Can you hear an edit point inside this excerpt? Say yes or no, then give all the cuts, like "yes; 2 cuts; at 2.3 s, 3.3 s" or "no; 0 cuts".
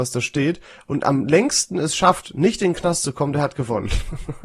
no; 0 cuts